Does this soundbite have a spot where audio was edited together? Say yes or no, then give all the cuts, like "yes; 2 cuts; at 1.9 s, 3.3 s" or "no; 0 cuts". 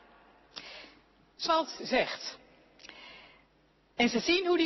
yes; 2 cuts; at 1.5 s, 1.8 s